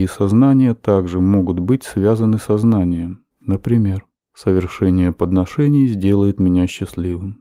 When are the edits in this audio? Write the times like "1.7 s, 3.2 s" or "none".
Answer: 3.3 s